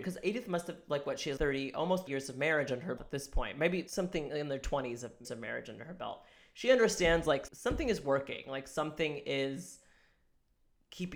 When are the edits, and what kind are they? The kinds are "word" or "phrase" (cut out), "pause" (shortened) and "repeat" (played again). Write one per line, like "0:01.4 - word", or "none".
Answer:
0:01.4 - word
0:02.1 - word
0:03.0 - word
0:03.9 - word
0:05.2 - word
0:07.5 - word